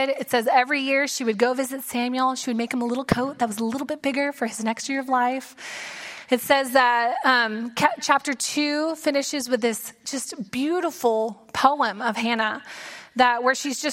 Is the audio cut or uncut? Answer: uncut